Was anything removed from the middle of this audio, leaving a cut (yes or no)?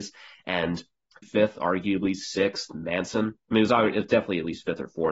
yes